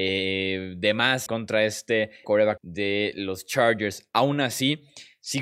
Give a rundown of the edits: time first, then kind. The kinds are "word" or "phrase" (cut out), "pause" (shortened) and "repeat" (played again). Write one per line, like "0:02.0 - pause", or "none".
0:01.3 - word
0:02.2 - word
0:02.6 - word

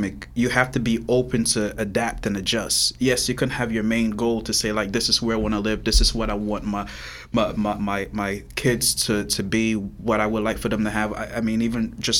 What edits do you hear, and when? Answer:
none

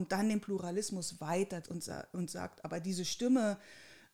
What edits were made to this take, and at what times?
0:01.6 - word

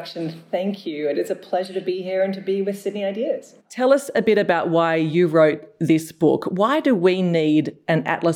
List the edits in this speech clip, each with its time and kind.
0:03.6 - pause

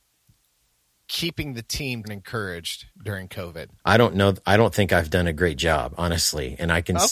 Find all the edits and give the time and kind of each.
0:02.0 - word

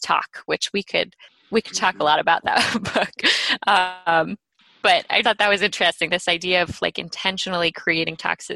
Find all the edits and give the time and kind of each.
0:05.2 - word

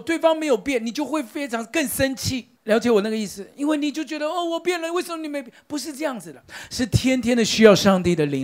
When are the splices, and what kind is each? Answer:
0:02.6 - pause

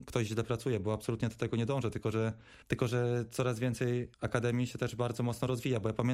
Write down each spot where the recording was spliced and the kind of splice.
0:02.6 - pause
0:04.1 - pause

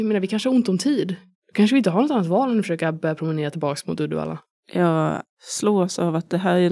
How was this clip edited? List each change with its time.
none

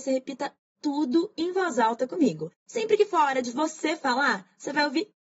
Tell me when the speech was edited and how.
0:02.6 - pause

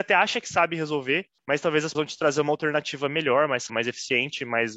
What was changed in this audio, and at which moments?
0:01.4 - pause
0:01.9 - word
0:03.7 - word

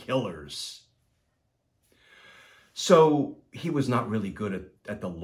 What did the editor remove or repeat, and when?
none

